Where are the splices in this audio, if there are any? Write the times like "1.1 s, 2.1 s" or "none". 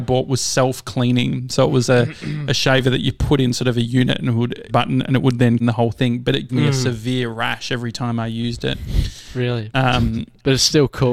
4.7 s, 5.6 s, 6.5 s